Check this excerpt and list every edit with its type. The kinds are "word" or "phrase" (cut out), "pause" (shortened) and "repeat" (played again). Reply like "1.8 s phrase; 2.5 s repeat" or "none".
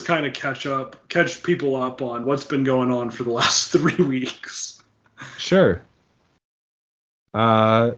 2.2 s word